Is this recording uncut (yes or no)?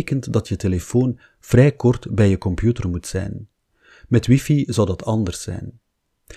yes